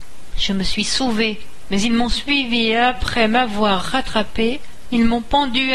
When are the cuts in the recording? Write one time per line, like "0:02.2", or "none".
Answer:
none